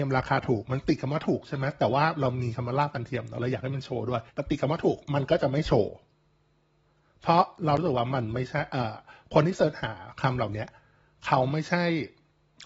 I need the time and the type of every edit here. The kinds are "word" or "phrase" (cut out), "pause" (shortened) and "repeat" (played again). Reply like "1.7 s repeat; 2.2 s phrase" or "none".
4.3 s pause